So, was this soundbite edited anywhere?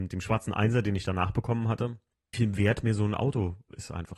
yes; 1 cut; at 2.3 s

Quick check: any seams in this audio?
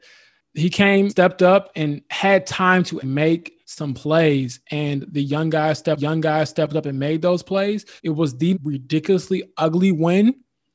yes; 6 cuts; at 1.1 s, 3.0 s, 3.6 s, 6.0 s, 8.0 s, 8.5 s

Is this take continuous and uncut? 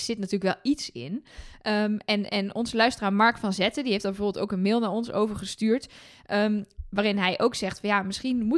yes; 0 cuts

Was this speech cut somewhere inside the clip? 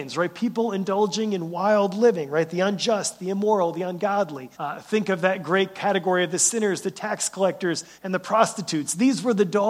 yes; 2 cuts; at 4.5 s, 7.9 s

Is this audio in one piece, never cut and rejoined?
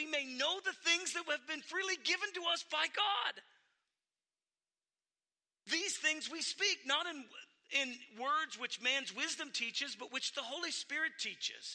yes; 0 cuts

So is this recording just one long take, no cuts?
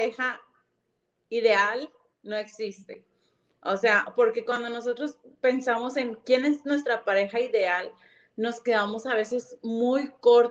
yes; 0 cuts

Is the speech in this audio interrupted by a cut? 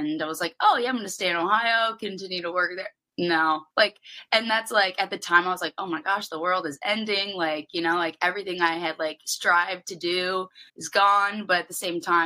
yes; 2 cuts; at 3.7 s, 10.7 s

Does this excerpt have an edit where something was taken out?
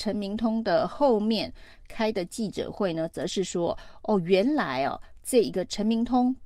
no; 0 cuts

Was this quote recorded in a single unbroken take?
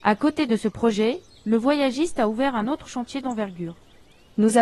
yes; 0 cuts

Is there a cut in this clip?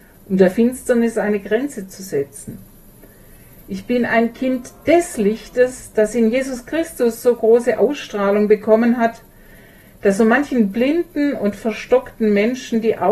no; 0 cuts

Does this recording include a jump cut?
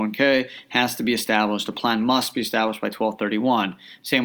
no; 0 cuts

